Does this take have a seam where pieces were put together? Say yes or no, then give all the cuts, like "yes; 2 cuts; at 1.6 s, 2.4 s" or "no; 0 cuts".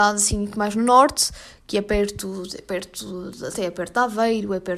no; 0 cuts